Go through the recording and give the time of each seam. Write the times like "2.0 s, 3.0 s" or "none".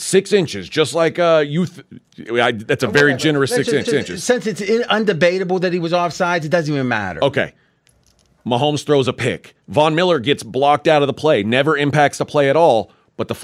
3.8 s, 9.6 s